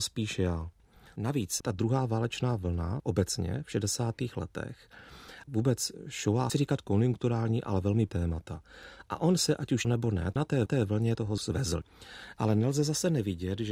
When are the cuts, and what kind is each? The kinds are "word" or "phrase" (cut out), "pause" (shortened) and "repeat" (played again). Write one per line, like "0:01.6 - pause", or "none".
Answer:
0:05.5 - word
0:06.5 - phrase
0:08.1 - word
0:09.8 - word
0:10.7 - repeat
0:11.4 - word

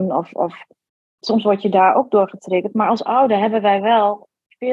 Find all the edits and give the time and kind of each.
none

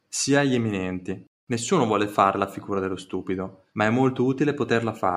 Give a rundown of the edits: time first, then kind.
0:01.4 - pause
0:03.7 - pause

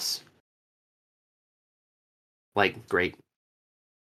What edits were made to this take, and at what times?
0:02.9 - word

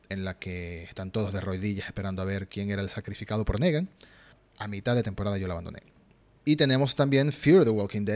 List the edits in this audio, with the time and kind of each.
none

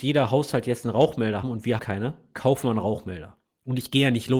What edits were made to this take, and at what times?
0:01.4 - word
0:01.8 - word

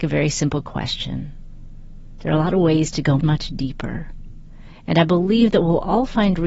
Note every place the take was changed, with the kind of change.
0:03.2 - word

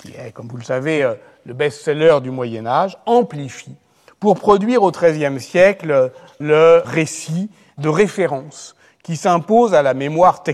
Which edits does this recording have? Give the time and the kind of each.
none

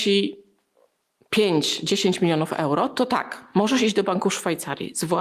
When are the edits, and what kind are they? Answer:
none

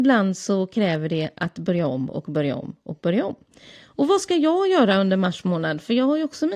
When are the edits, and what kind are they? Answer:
none

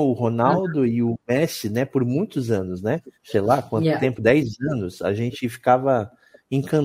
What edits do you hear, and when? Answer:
0:03.1 - pause

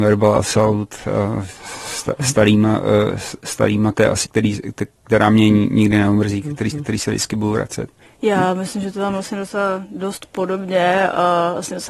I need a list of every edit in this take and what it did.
0:03.9 - phrase
0:04.2 - word
0:06.7 - repeat
0:08.0 - pause

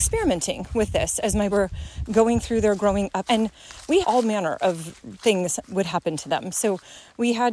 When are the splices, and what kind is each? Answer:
0:01.5 - word
0:03.3 - word
0:04.0 - word
0:05.6 - word

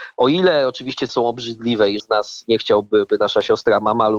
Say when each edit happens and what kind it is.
0:01.1 - phrase
0:02.0 - word

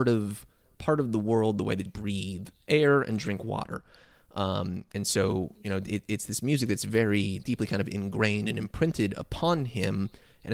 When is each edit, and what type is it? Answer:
0:01.9 - word
0:04.9 - word
0:07.4 - word

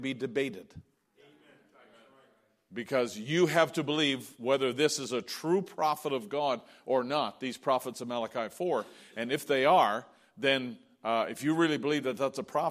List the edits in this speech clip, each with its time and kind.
none

